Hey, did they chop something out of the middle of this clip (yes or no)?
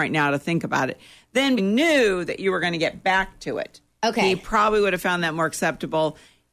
yes